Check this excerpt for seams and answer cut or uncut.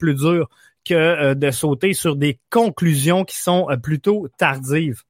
uncut